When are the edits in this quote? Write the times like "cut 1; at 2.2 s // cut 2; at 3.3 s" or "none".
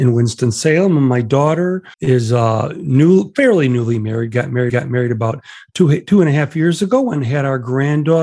cut 1; at 1.9 s // cut 2; at 4.7 s